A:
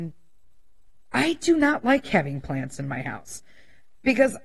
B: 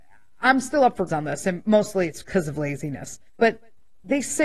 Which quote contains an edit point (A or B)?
B